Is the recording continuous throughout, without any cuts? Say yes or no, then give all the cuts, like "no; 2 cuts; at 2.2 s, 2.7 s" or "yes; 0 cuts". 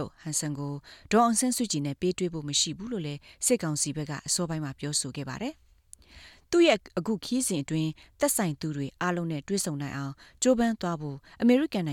yes; 0 cuts